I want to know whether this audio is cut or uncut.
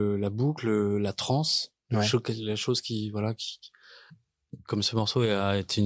uncut